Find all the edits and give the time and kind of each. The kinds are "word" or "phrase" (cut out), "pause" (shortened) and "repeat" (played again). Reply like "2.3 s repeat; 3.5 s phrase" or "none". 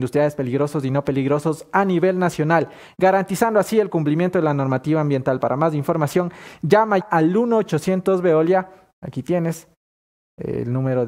7.0 s word